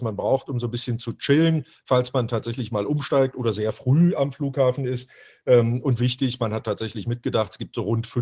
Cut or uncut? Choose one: uncut